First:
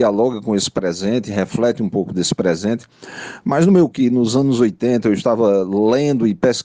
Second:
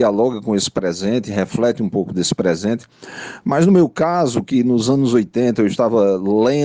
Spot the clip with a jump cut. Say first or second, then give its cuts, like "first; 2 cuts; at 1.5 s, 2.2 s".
first; 1 cut; at 3.9 s